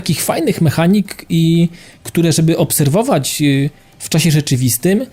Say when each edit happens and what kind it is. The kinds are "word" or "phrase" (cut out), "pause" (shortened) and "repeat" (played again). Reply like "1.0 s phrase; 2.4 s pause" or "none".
none